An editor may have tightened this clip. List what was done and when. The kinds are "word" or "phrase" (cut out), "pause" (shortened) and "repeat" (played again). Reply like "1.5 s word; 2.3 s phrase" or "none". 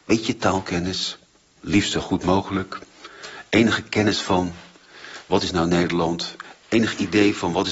1.6 s word

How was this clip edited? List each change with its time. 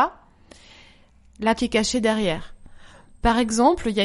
1.6 s word

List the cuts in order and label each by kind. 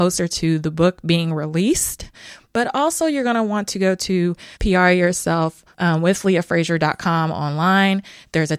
4.5 s pause; 5.7 s pause

